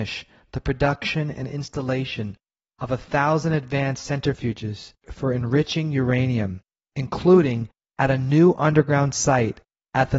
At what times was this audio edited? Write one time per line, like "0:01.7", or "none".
none